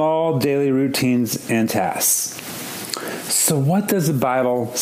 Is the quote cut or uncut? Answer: uncut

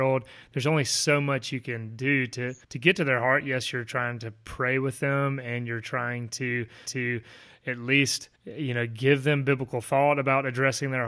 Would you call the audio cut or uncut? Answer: cut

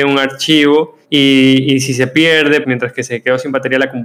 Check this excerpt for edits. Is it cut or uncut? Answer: cut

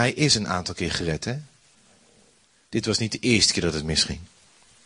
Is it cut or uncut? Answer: uncut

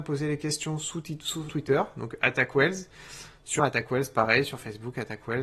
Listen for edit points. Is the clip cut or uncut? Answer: cut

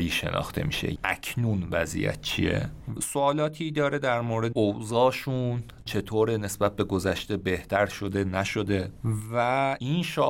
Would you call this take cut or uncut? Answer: cut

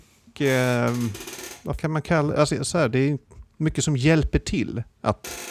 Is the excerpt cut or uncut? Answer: cut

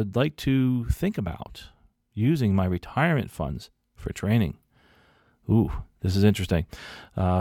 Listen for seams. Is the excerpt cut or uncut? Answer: uncut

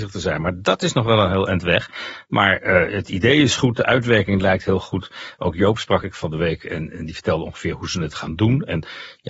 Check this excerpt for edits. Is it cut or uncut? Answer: uncut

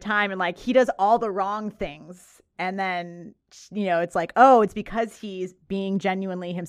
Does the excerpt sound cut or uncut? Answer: uncut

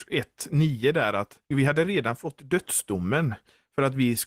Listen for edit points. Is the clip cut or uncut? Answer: cut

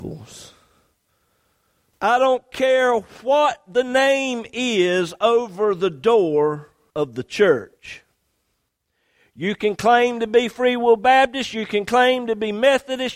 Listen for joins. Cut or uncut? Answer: uncut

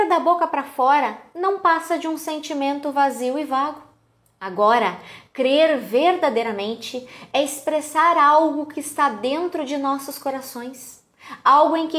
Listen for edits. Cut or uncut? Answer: uncut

